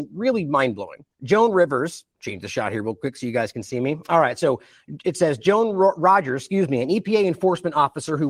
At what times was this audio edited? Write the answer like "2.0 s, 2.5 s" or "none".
1.1 s, 2.1 s